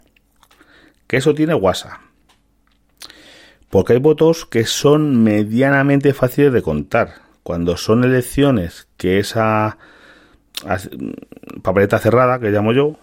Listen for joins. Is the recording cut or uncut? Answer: uncut